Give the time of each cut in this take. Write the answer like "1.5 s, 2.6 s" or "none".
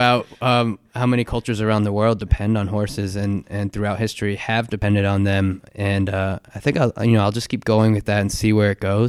none